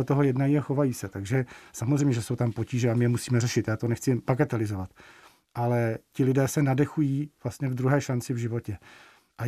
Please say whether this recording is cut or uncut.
uncut